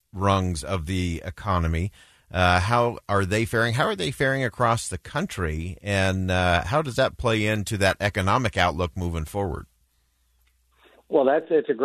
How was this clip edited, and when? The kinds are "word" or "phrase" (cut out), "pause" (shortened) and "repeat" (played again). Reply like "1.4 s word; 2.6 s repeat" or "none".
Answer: none